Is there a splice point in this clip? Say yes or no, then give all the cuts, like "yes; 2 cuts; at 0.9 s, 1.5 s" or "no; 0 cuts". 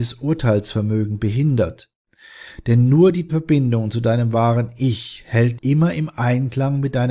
yes; 2 cuts; at 3.3 s, 5.6 s